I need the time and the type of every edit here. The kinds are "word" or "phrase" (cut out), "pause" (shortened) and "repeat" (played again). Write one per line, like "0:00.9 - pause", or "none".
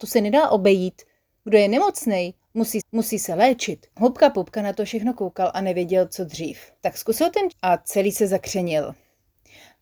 0:02.8 - repeat
0:03.9 - pause
0:06.8 - pause
0:07.5 - word